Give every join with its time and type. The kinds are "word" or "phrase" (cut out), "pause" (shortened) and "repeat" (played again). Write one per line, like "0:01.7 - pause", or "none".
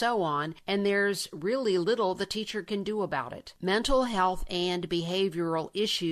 none